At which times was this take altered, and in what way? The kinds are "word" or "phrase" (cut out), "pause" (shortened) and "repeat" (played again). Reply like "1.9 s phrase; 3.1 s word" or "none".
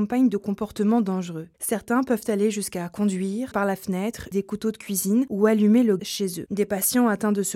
3.5 s word; 4.3 s word; 6.0 s word